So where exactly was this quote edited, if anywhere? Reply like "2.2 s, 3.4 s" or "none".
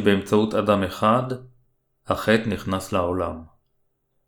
none